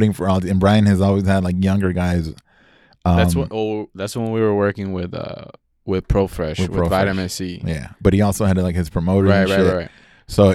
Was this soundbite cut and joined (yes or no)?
no